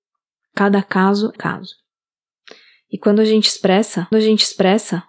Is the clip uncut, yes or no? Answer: no